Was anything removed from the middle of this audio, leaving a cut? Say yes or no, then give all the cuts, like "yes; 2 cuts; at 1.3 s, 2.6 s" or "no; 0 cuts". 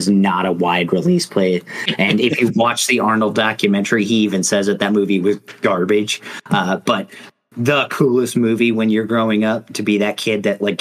no; 0 cuts